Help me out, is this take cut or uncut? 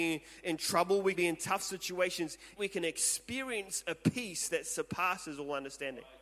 cut